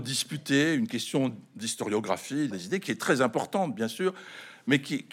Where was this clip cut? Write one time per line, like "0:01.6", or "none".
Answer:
0:02.5